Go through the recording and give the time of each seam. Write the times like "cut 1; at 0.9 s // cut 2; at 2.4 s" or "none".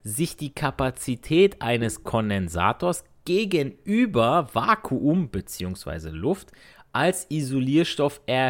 none